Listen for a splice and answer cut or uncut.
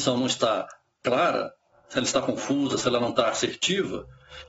uncut